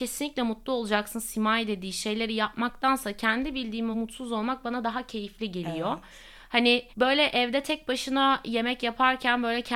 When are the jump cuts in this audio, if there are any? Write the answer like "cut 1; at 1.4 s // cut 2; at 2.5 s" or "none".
cut 1; at 3.9 s // cut 2; at 6.9 s